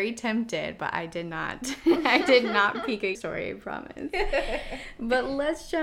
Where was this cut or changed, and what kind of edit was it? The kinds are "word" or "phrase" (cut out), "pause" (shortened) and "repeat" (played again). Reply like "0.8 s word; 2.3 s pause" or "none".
3.1 s word